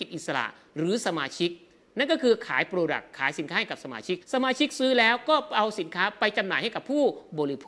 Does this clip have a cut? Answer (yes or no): yes